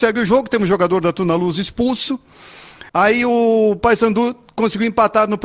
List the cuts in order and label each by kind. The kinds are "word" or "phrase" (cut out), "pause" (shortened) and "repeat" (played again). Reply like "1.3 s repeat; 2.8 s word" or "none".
2.9 s pause

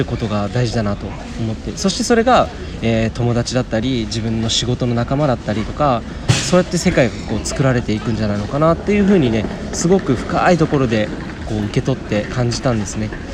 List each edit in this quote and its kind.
none

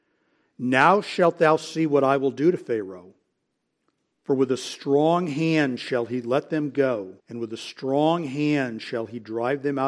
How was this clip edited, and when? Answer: 7.2 s pause

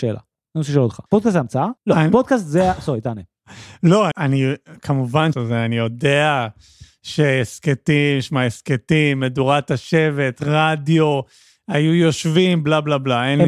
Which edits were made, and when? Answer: 1.1 s pause; 1.8 s pause; 4.1 s word; 5.3 s phrase

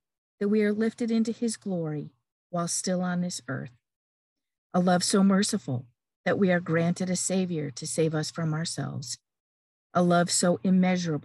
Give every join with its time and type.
none

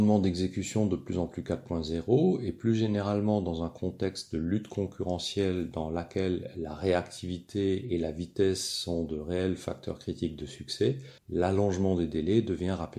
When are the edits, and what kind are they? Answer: 11.2 s pause

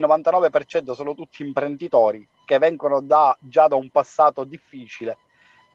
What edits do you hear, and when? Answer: 2.3 s pause

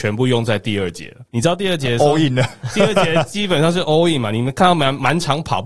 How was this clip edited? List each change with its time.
none

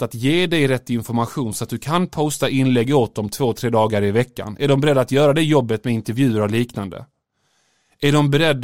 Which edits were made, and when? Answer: none

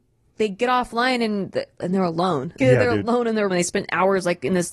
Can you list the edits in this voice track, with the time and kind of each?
2.6 s word; 3.5 s word

